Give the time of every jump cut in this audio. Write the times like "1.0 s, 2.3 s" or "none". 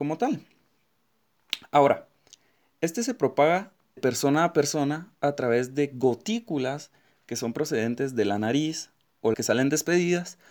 4.0 s, 9.3 s